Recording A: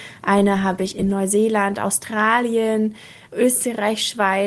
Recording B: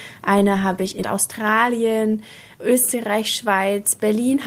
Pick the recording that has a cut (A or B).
B